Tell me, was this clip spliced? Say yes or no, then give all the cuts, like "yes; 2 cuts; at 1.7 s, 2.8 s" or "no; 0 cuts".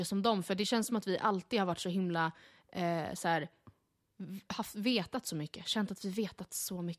no; 0 cuts